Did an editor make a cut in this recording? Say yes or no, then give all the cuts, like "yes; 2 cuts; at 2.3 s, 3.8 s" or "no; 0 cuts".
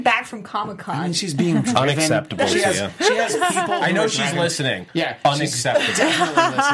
no; 0 cuts